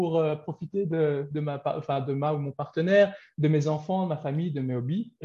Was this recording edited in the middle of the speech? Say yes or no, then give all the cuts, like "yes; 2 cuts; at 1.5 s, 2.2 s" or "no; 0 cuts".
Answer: no; 0 cuts